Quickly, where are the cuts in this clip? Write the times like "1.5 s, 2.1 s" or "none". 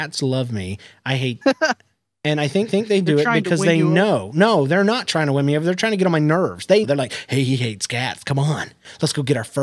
1.4 s, 2.7 s, 6.8 s